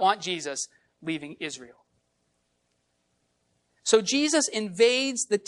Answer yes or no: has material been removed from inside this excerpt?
no